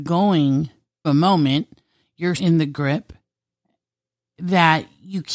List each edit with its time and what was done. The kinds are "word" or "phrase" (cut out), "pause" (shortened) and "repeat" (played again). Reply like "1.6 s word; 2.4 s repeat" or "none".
1.0 s word; 2.4 s word